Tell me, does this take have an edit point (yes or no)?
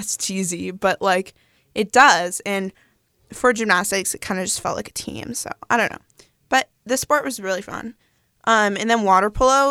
no